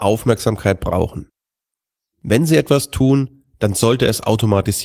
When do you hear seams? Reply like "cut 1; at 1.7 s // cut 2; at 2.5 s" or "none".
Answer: none